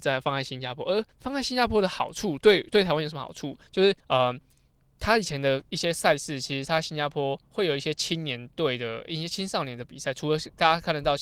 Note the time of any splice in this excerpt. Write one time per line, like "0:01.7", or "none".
0:01.1
0:03.7
0:04.0